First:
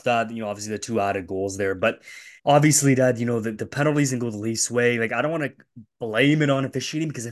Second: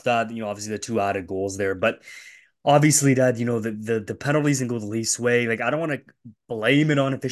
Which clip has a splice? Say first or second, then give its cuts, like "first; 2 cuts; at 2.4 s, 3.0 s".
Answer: first; 2 cuts; at 2.4 s, 3.5 s